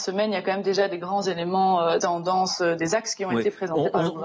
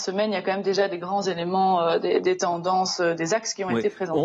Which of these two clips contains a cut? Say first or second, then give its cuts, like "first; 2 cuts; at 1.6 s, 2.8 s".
first; 1 cut; at 2.0 s